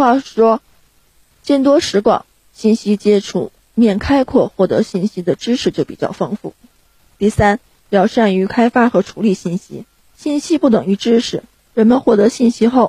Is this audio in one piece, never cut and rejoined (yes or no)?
yes